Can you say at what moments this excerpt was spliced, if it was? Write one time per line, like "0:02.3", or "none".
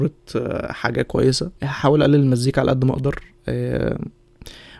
0:01.6